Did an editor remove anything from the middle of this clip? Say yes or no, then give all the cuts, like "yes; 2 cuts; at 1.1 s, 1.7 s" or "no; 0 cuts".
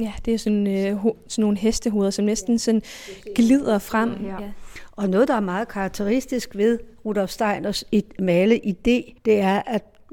yes; 1 cut; at 9.2 s